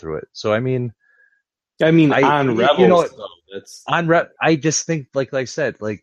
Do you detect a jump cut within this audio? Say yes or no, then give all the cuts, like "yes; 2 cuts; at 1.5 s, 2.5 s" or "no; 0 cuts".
yes; 1 cut; at 1.4 s